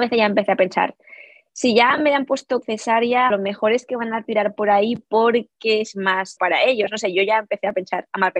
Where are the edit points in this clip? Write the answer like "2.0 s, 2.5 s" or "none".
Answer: 2.6 s, 3.3 s, 6.4 s